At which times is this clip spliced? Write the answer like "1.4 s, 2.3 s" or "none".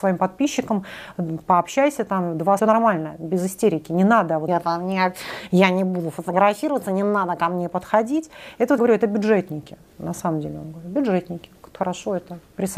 2.6 s, 4.5 s, 8.8 s, 9.9 s, 11.8 s